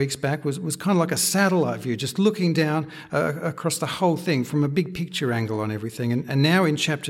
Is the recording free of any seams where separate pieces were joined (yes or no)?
yes